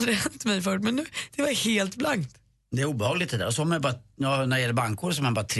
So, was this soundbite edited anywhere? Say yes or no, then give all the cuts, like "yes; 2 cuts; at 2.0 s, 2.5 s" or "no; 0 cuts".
no; 0 cuts